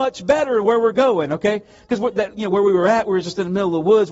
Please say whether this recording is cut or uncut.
uncut